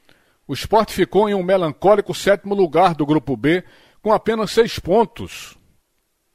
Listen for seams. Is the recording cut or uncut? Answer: uncut